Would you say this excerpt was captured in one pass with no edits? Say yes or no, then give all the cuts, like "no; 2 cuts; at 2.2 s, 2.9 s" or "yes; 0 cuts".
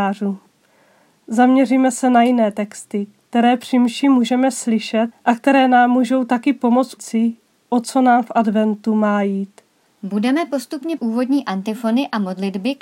no; 3 cuts; at 5.1 s, 7.0 s, 11.0 s